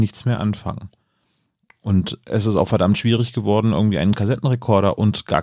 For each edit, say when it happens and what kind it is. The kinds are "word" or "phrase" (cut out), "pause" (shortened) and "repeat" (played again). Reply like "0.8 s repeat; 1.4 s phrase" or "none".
none

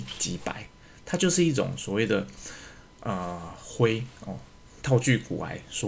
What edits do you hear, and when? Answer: none

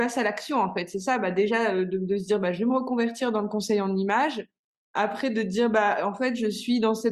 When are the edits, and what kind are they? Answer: none

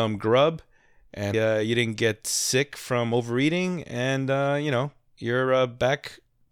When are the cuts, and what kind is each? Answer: 1.3 s word

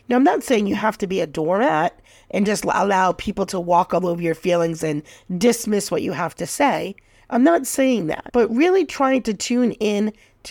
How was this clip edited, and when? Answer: none

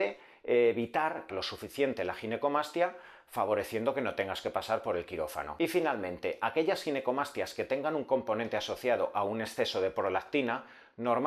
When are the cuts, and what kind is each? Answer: 1.3 s phrase

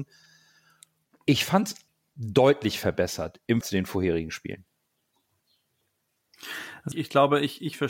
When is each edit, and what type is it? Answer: 1.9 s pause; 3.6 s word; 6.9 s word

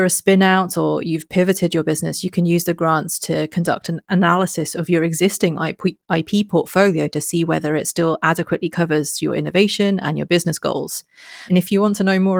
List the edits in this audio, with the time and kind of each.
none

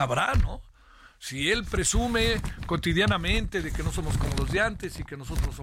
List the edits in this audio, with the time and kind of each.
none

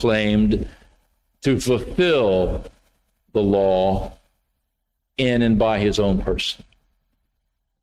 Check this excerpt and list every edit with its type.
none

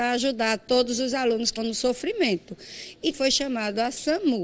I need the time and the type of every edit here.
1.6 s word; 3.1 s word

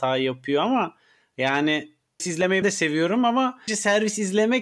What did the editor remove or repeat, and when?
2.2 s word; 2.6 s word; 3.7 s word

